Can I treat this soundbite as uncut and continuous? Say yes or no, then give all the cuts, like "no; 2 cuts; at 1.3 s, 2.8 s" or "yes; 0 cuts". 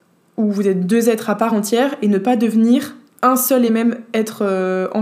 yes; 0 cuts